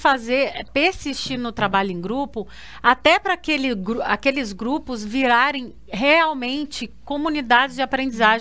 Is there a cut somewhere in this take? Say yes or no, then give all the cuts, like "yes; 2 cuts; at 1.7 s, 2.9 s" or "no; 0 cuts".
no; 0 cuts